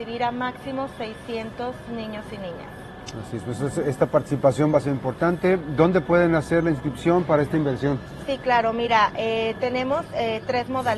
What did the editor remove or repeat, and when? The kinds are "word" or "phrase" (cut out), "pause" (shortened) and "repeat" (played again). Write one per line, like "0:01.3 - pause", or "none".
none